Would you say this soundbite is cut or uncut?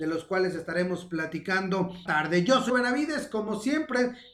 cut